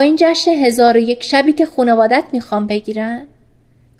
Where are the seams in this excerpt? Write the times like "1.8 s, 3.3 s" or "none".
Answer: none